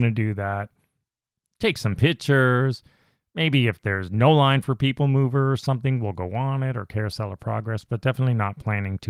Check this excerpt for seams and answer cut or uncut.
uncut